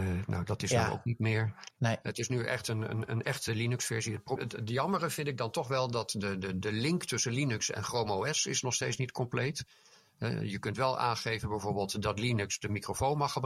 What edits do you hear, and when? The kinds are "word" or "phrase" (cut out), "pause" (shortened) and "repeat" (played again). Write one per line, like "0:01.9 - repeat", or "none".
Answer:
0:01.7 - pause
0:04.4 - word